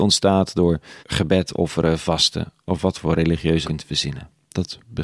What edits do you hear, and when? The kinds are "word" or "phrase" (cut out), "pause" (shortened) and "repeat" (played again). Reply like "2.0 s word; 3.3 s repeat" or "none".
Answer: 1.0 s pause; 3.6 s phrase